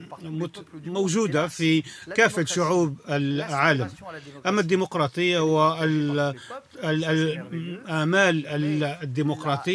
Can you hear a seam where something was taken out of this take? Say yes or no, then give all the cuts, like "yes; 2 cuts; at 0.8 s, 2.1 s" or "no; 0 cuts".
no; 0 cuts